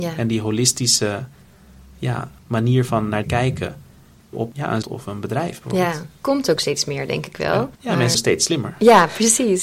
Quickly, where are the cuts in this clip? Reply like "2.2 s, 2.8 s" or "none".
2.4 s, 3.2 s, 4.3 s, 4.8 s, 6.2 s, 7.8 s, 8.1 s